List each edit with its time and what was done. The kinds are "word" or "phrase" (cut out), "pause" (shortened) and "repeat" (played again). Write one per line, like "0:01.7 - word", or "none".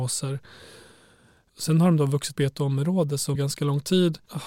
0:02.4 - word
0:03.4 - word